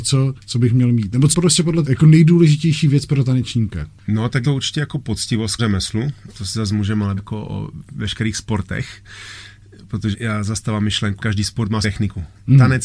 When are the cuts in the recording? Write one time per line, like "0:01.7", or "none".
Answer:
0:01.3
0:01.8
0:04.4
0:05.6
0:07.2
0:10.1
0:11.2
0:11.8

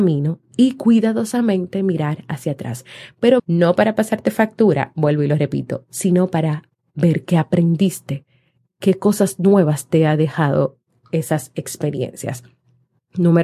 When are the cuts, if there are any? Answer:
0:03.4

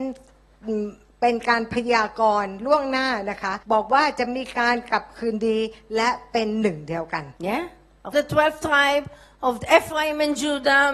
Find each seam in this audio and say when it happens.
0:03.6
0:07.4
0:08.1

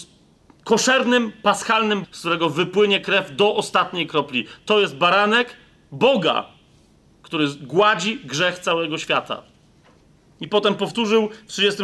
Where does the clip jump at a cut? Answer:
0:02.0

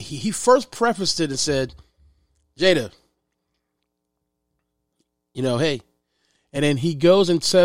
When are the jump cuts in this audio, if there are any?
none

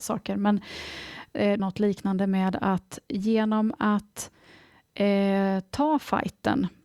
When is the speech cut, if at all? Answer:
0:01.6

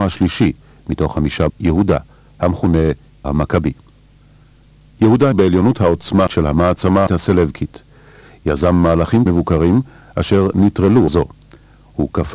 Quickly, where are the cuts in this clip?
0:01.5
0:03.2
0:05.3
0:06.3
0:07.1
0:09.3
0:11.1

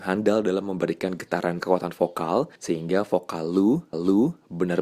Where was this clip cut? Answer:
0:01.6
0:02.6
0:03.9

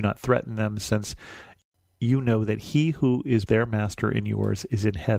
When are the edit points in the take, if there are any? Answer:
0:03.5

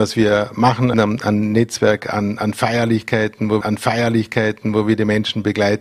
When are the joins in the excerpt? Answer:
0:00.9
0:03.6

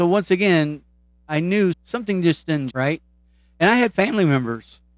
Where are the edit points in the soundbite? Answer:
0:01.7
0:02.7

